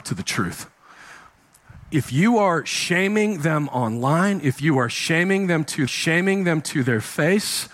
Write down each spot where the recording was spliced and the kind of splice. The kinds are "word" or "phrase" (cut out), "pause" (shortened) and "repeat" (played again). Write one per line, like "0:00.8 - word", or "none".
0:05.9 - repeat